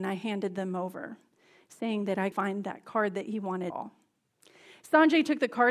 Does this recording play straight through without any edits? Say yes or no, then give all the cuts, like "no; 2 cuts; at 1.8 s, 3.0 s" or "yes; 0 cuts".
no; 2 cuts; at 2.3 s, 3.7 s